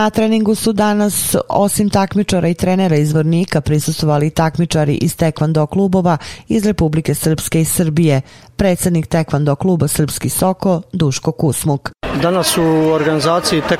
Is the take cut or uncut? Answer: uncut